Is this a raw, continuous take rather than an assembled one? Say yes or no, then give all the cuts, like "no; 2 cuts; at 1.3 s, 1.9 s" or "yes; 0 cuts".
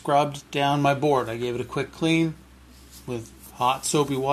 yes; 0 cuts